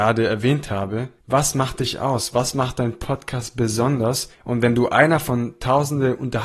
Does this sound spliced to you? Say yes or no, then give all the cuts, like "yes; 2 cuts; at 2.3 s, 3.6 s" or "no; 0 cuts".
yes; 2 cuts; at 1.2 s, 4.3 s